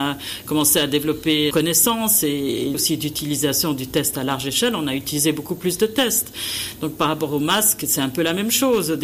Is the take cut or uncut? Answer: cut